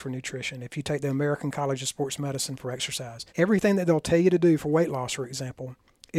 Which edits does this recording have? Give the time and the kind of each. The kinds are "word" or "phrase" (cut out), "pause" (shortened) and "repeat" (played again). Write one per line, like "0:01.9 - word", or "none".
0:03.3 - pause

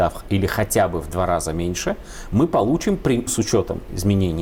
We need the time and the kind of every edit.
0:03.3 - word

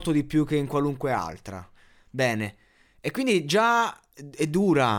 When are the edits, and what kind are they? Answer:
none

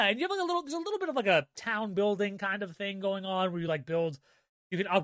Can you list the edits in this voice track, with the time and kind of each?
none

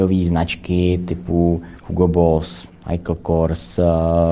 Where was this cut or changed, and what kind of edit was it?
0:01.8 - pause

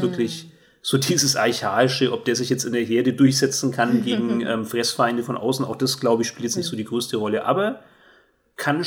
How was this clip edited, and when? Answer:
none

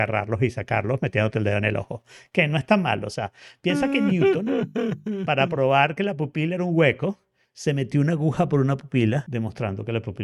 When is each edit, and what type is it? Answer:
none

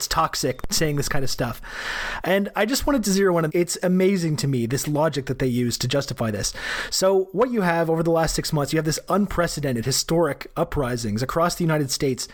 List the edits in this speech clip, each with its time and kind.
0:03.5 - phrase

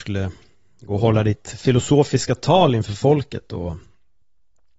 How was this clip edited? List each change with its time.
none

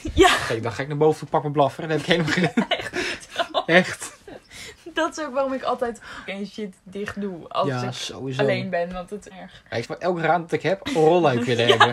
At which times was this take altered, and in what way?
0:02.4 - word
0:06.3 - word
0:09.3 - phrase
0:09.8 - phrase

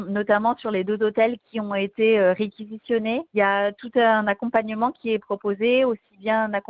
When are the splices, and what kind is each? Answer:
0:03.3 - pause

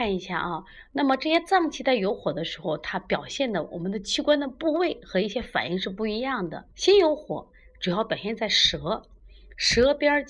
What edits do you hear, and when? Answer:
0:06.7 - pause

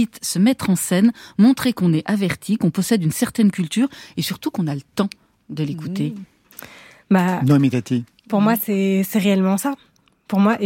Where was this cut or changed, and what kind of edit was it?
none

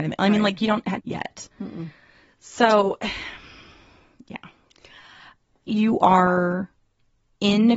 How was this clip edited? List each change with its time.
0:01.0 - phrase
0:01.5 - pause
0:05.7 - word

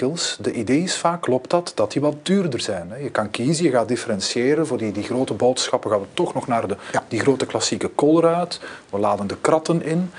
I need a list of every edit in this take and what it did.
none

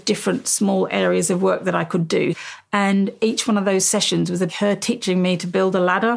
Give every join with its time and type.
0:04.5 - phrase

